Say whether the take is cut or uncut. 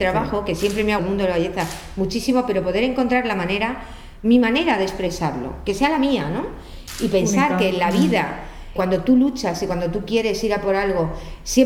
cut